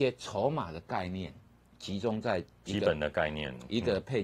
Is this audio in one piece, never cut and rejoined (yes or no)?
yes